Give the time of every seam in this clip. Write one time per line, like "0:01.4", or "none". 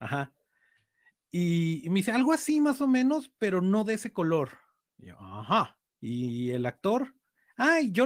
0:05.9